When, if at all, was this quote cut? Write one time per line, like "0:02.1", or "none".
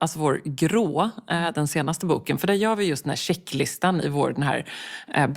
none